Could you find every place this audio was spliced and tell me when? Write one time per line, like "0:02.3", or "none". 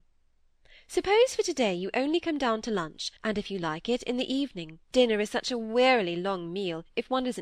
0:03.2
0:04.8